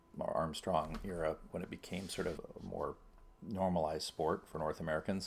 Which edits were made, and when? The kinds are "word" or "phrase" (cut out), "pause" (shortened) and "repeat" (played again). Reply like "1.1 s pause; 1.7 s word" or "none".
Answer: 1.5 s word; 2.4 s word; 3.4 s pause